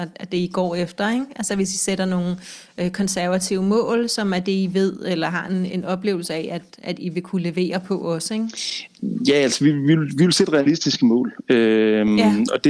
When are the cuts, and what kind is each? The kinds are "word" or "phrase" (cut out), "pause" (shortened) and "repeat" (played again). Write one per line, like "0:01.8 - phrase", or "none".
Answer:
none